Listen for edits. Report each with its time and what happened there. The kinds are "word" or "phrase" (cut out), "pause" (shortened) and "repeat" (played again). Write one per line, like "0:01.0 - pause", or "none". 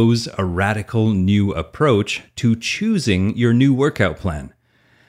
none